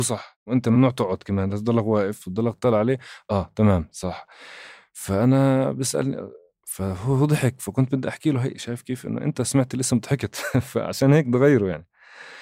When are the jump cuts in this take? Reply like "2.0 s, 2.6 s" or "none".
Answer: none